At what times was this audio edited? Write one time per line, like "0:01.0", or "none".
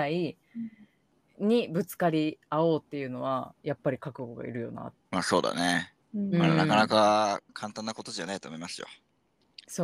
0:05.0
0:06.0
0:07.5